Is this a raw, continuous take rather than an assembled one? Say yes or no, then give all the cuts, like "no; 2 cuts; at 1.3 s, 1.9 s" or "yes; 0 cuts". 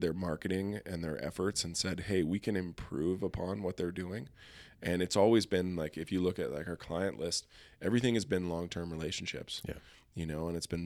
yes; 0 cuts